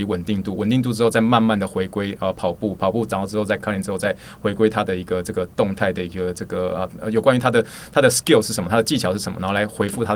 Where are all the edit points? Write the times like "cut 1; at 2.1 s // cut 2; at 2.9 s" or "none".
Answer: cut 1; at 3.6 s